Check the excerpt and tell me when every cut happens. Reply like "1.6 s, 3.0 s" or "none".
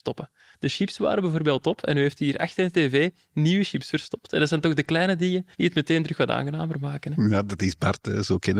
5.5 s